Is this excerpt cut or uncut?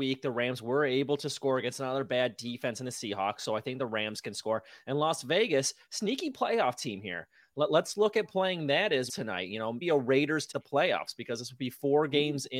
cut